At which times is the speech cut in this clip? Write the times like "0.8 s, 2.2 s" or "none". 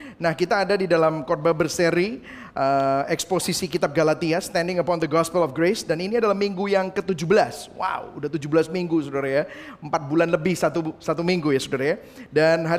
none